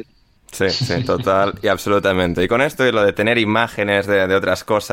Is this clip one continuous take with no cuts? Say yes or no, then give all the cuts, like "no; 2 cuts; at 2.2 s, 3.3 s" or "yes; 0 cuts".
yes; 0 cuts